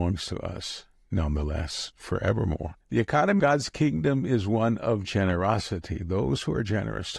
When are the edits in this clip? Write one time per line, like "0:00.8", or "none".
0:01.0
0:02.8
0:03.4